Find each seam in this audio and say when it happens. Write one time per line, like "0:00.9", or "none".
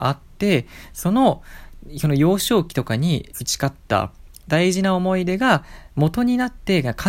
0:03.3